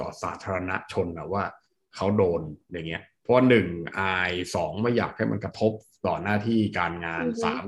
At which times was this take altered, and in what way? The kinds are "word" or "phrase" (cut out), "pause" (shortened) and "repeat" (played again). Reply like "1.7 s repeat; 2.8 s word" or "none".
none

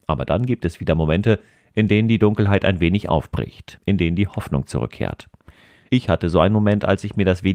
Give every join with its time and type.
none

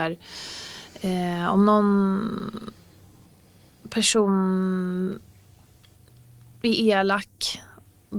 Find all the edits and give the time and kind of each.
none

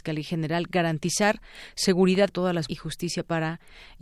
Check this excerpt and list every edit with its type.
2.3 s word; 2.7 s word

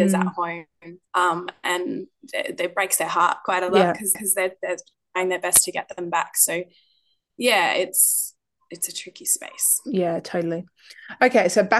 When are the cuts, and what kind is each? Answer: 1.1 s pause; 4.1 s repeat

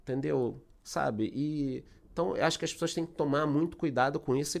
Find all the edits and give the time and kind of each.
none

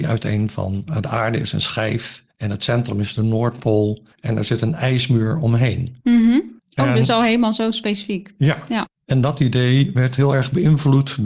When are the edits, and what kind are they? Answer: 2.3 s pause; 4.1 s pause; 6.0 s pause; 6.6 s pause

